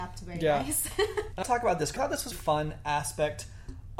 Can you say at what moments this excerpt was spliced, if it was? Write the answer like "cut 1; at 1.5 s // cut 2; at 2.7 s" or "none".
cut 1; at 1.4 s // cut 2; at 2.0 s // cut 3; at 2.3 s